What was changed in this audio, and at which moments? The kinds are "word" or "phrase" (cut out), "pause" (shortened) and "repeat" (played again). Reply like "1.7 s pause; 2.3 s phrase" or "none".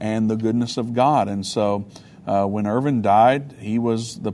none